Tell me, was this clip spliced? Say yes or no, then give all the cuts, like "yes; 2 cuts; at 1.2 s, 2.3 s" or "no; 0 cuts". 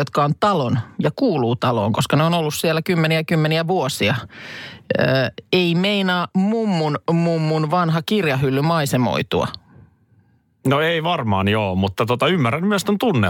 no; 0 cuts